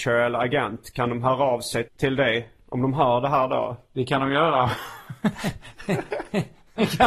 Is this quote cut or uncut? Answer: cut